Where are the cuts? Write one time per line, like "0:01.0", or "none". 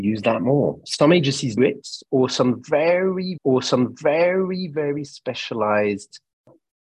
0:01.6
0:03.4